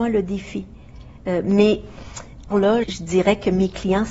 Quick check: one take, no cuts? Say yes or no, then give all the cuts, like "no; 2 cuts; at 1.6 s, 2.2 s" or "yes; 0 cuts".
no; 2 cuts; at 2.5 s, 2.8 s